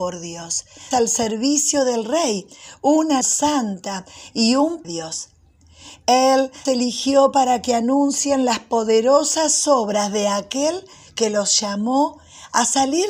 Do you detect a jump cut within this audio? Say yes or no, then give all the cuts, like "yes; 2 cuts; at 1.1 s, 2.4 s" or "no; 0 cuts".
yes; 4 cuts; at 0.9 s, 3.2 s, 4.8 s, 6.7 s